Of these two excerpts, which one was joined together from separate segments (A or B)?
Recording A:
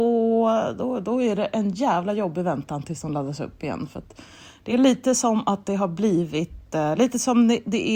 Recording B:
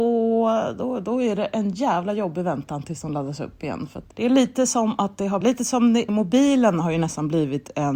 B